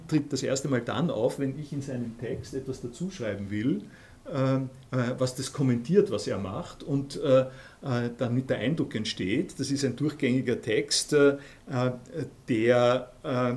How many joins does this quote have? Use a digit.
0